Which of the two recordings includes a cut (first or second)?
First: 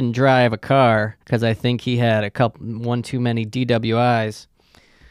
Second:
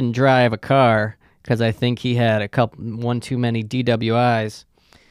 first